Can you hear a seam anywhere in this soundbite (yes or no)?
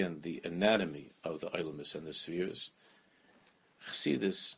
no